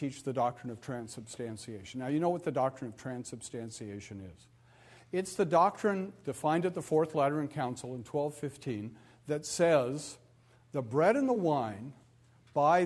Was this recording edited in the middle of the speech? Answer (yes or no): no